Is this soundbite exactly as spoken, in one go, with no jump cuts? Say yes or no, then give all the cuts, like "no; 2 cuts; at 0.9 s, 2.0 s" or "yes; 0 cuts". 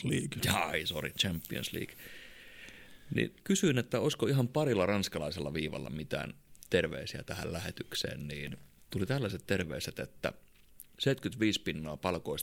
no; 2 cuts; at 3.4 s, 8.8 s